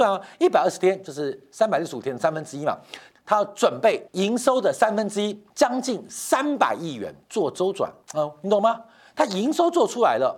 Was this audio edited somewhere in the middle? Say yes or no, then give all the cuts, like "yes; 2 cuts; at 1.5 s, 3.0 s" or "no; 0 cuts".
yes; 5 cuts; at 3.1 s, 4.1 s, 5.5 s, 7.2 s, 8.0 s